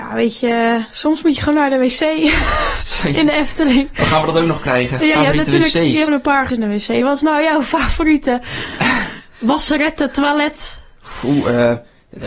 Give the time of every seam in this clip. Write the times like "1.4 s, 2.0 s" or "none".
5.1 s, 6.1 s, 6.5 s